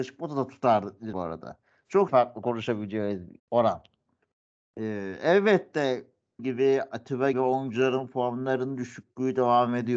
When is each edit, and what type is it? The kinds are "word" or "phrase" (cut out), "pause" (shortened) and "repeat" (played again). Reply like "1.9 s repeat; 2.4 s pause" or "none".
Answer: 1.1 s word; 2.1 s word; 3.4 s word; 6.4 s word; 7.3 s word

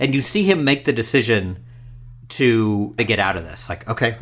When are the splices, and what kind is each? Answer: 3.0 s word

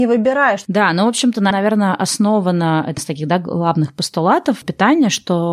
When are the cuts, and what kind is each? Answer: 1.5 s word; 3.0 s word; 4.6 s word

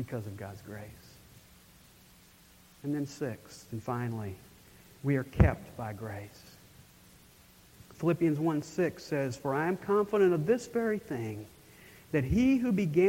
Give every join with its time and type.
none

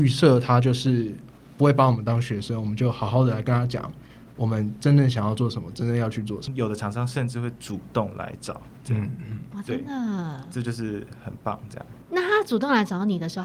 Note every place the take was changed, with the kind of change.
none

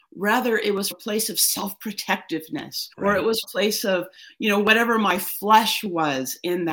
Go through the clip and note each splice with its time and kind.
0.9 s word; 2.9 s pause; 3.4 s phrase

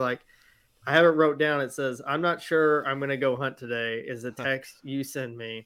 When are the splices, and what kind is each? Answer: none

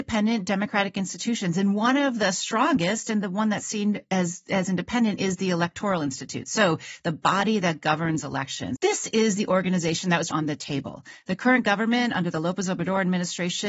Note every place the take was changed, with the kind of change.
8.8 s word; 10.3 s word

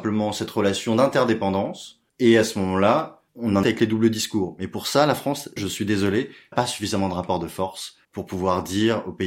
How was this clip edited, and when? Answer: 2.1 s pause; 3.3 s pause; 3.6 s word; 5.6 s word; 6.5 s word; 8.0 s pause

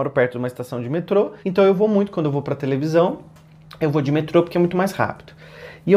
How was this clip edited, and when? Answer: 1.4 s pause

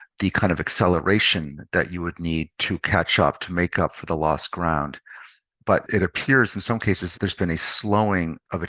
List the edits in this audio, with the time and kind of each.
none

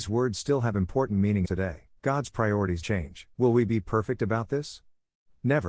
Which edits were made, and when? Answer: 1.4 s phrase; 2.0 s pause; 2.8 s word; 3.3 s pause

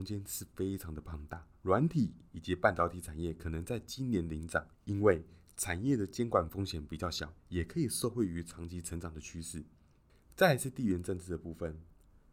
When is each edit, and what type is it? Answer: 1.6 s pause; 4.7 s pause; 7.4 s pause

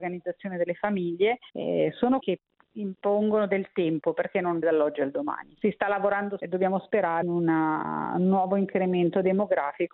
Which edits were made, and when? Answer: 1.5 s pause; 2.2 s phrase; 4.6 s phrase; 6.4 s phrase; 7.2 s word

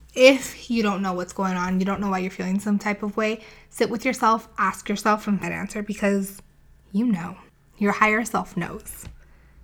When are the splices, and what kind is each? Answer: 5.4 s word; 7.5 s pause

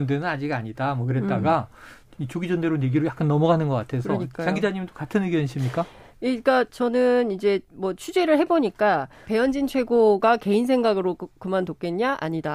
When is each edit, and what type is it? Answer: 9.3 s word

